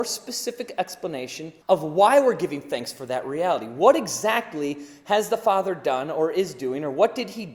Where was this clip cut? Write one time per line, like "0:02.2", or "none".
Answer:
0:01.6